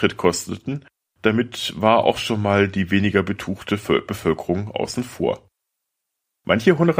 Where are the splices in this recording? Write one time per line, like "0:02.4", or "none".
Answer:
none